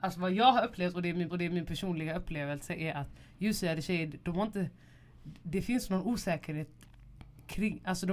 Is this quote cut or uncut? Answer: cut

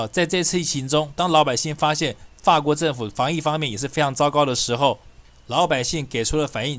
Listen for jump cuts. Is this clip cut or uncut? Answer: uncut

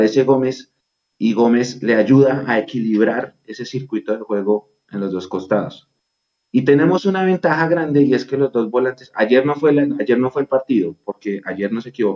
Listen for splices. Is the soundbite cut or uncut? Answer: uncut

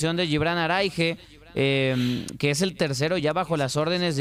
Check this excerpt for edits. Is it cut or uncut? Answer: uncut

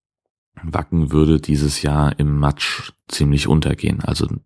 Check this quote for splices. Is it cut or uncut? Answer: uncut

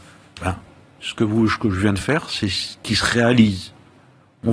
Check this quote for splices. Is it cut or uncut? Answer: uncut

